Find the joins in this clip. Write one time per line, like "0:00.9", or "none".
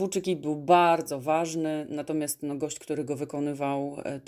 none